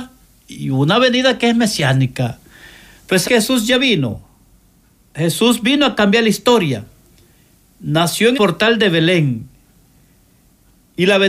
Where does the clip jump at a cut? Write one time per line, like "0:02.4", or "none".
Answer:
0:03.2
0:08.3